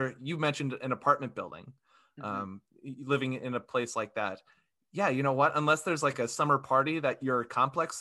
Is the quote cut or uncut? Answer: uncut